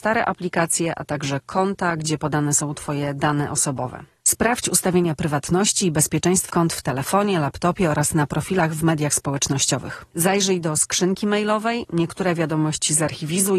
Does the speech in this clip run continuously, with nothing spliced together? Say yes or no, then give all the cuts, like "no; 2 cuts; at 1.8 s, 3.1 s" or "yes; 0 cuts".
no; 1 cut; at 6.5 s